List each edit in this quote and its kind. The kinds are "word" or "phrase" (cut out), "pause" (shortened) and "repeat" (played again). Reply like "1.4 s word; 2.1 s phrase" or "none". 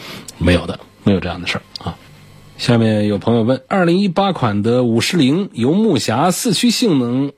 3.6 s pause